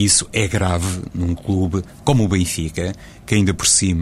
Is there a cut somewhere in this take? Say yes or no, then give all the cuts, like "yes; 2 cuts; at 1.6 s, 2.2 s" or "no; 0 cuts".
no; 0 cuts